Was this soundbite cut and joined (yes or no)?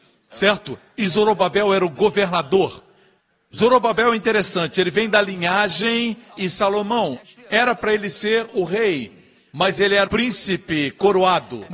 yes